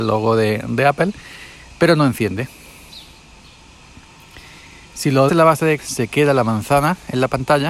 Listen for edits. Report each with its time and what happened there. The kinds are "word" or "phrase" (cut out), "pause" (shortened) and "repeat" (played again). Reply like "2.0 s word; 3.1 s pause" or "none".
5.3 s word; 5.8 s word